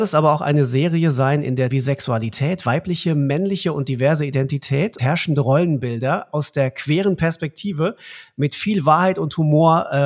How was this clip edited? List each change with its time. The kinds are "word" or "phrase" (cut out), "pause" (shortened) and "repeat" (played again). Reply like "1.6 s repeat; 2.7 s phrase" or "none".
1.7 s word; 5.0 s word